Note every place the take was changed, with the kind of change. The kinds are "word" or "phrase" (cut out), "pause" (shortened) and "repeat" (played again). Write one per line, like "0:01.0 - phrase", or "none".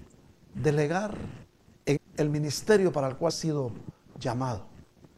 0:02.0 - word
0:03.3 - word